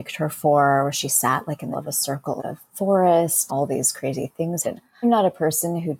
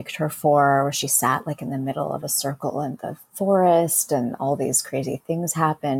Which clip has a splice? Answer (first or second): first